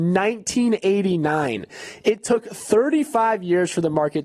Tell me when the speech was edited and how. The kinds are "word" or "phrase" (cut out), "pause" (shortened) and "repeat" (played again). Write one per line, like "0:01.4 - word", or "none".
none